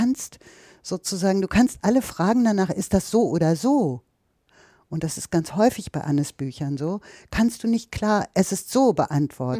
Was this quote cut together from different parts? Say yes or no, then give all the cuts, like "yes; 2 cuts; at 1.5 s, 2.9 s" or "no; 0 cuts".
no; 0 cuts